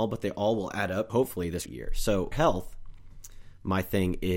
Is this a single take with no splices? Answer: no; 3 cuts; at 1.1 s, 1.7 s, 2.3 s

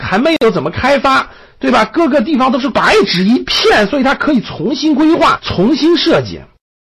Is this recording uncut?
yes; 0 cuts

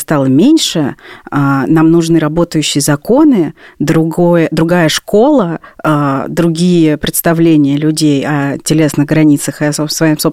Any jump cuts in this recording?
no; 0 cuts

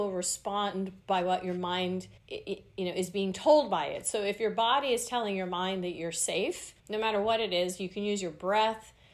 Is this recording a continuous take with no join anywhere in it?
no; 2 cuts; at 2.2 s, 6.8 s

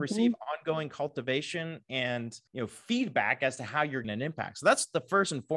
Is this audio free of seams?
no; 2 cuts; at 2.5 s, 4.0 s

